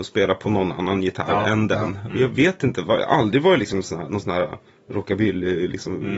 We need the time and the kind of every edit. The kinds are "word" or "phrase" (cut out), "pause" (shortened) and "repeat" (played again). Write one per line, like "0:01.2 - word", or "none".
0:04.7 - pause